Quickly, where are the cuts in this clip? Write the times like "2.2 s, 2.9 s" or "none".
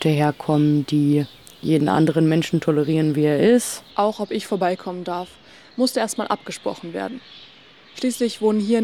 none